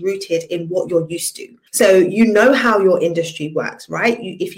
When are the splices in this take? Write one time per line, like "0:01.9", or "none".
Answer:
0:01.7